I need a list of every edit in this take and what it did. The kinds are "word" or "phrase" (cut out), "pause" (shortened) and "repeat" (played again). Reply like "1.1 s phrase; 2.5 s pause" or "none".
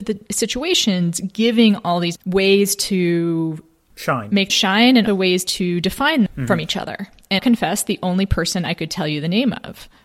2.2 s phrase; 4.5 s phrase; 5.1 s word; 6.3 s word; 7.4 s word